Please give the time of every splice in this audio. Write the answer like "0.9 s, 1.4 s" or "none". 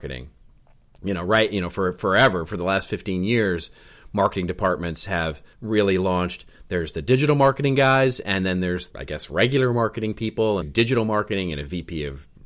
5.5 s, 8.9 s, 10.6 s